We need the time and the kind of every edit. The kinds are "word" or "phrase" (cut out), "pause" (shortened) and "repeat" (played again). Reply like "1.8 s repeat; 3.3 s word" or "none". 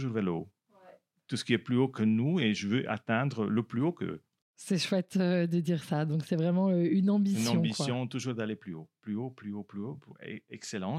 none